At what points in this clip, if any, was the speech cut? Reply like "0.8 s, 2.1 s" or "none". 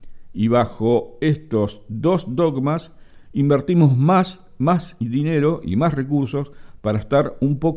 none